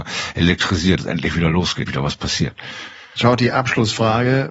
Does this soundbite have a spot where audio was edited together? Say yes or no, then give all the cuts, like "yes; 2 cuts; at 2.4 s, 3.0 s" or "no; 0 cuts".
yes; 2 cuts; at 1.0 s, 1.9 s